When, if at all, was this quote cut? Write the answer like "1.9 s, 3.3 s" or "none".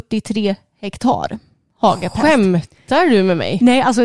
none